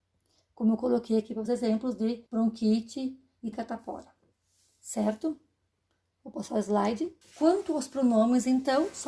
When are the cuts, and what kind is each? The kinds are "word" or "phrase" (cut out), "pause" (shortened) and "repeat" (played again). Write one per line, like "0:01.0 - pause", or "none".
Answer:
0:01.5 - word
0:02.3 - pause
0:03.5 - word
0:05.9 - pause
0:07.2 - pause